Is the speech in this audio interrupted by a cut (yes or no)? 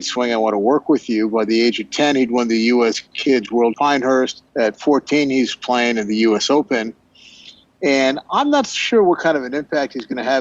yes